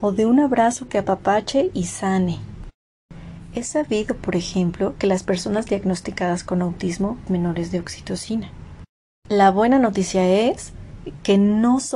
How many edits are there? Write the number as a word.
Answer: one